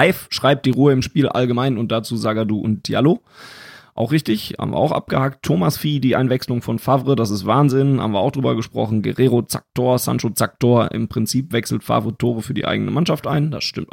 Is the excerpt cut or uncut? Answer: uncut